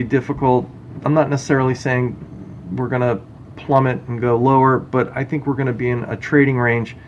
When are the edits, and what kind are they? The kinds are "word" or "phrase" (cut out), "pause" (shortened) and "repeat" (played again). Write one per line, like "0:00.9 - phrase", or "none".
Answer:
none